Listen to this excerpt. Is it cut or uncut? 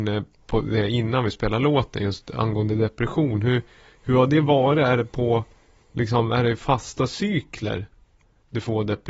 uncut